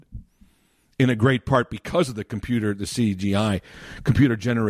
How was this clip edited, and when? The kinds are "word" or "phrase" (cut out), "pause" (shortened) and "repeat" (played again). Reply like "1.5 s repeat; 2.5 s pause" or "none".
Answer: none